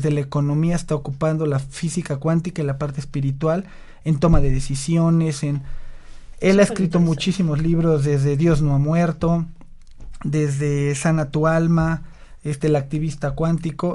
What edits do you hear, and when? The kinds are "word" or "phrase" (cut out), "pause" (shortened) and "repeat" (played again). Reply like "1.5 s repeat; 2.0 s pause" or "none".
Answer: none